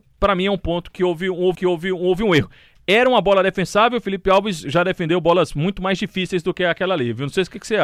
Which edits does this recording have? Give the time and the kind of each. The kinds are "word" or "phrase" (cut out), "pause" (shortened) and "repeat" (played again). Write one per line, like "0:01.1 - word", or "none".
0:01.5 - repeat